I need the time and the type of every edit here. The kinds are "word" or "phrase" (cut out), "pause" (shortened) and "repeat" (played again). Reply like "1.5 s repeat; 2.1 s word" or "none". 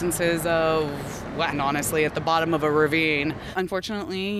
1.5 s word; 2.1 s phrase